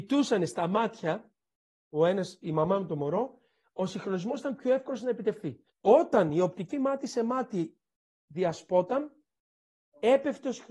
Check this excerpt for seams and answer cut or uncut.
cut